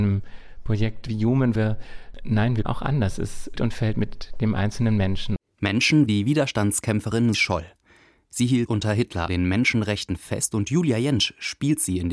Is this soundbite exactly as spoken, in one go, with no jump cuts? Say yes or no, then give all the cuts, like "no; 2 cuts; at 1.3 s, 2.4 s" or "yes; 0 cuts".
no; 7 cuts; at 1.5 s, 2.6 s, 3.5 s, 6.1 s, 7.3 s, 8.7 s, 9.3 s